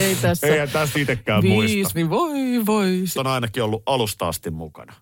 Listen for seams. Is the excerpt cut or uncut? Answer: cut